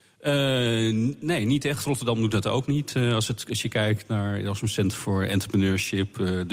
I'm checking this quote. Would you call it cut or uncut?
uncut